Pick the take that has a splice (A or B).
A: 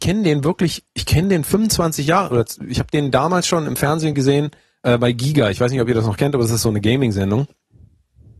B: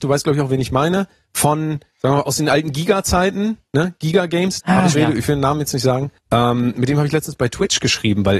B